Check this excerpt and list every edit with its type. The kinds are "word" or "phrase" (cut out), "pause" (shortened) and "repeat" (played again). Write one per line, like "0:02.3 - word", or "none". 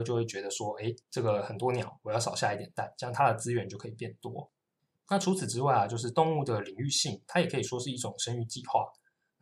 0:01.0 - pause
0:04.8 - pause